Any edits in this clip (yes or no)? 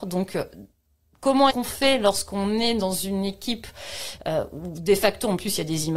yes